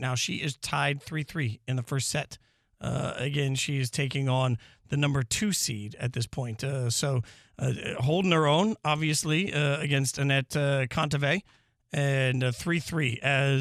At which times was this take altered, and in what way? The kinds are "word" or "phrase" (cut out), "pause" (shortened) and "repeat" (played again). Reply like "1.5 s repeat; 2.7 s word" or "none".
none